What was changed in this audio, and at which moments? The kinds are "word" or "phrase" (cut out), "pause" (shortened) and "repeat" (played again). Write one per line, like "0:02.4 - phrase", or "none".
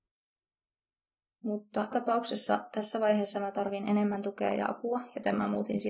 0:01.9 - word